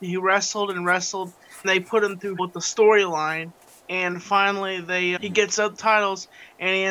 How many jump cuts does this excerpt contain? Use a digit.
5